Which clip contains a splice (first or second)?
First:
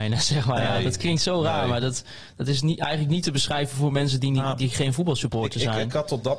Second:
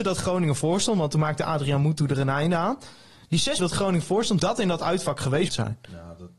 second